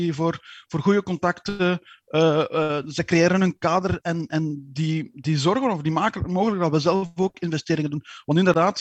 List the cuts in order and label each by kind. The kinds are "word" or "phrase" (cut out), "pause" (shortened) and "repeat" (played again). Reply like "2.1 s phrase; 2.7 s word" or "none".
none